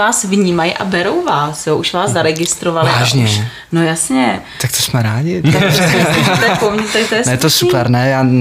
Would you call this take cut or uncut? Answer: uncut